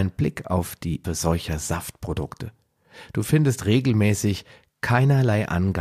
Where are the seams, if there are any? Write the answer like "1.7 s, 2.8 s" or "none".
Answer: 1.0 s